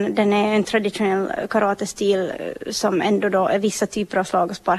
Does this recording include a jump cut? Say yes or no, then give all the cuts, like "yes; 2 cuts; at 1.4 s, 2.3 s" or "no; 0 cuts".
no; 0 cuts